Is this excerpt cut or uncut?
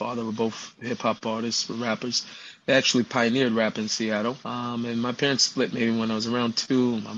cut